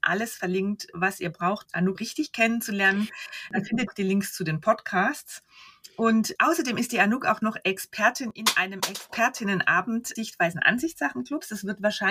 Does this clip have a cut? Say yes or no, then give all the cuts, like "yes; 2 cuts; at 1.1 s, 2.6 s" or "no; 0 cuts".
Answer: yes; 5 cuts; at 1.6 s, 1.9 s, 3.9 s, 6.3 s, 10.2 s